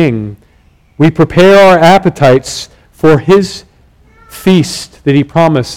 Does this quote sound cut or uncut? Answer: uncut